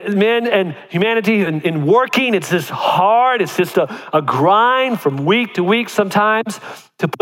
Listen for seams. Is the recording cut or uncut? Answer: uncut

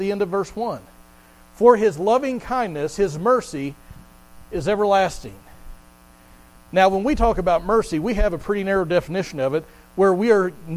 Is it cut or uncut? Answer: uncut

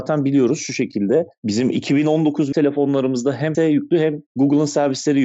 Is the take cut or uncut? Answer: cut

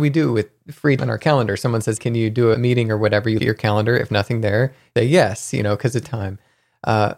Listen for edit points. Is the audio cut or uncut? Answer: cut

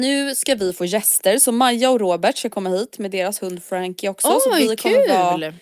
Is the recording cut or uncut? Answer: uncut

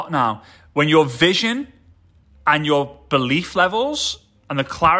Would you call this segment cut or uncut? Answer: uncut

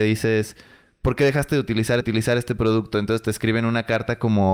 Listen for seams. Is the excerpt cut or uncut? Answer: cut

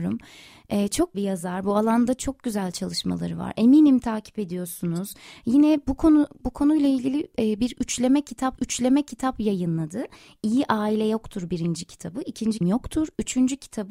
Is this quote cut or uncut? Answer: cut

